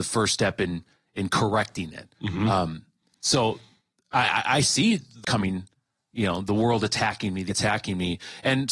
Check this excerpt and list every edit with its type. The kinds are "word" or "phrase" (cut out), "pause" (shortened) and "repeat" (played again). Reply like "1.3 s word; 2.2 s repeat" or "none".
5.2 s word; 7.5 s word